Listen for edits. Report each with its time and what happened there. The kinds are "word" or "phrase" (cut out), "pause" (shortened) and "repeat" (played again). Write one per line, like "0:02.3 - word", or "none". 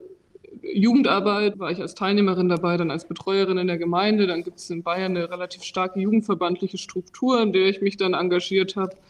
0:01.5 - word